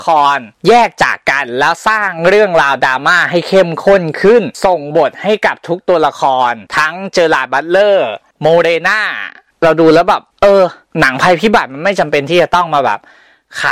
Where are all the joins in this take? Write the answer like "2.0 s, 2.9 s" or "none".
none